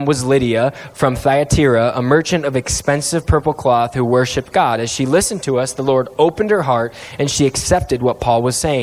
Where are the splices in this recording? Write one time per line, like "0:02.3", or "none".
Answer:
none

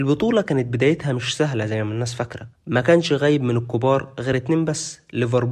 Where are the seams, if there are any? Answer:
none

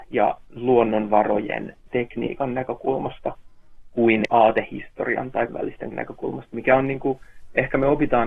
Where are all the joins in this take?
0:01.9
0:04.3
0:05.5
0:05.9

